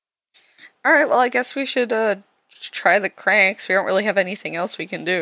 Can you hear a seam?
no; 0 cuts

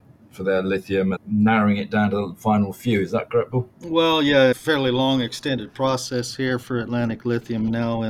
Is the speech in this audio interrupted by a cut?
yes; 3 cuts; at 1.2 s, 3.7 s, 4.5 s

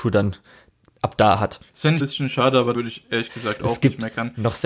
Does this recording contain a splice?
yes; 3 cuts; at 1.7 s, 2.0 s, 2.7 s

